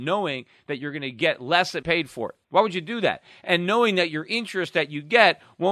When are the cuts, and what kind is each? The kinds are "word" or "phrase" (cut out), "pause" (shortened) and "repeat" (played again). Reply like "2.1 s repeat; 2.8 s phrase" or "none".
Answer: 1.8 s phrase; 2.4 s pause